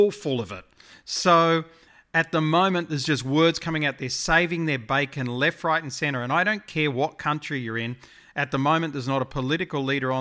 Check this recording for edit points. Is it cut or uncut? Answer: uncut